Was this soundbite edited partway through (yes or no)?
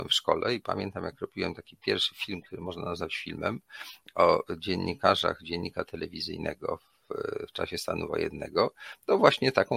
no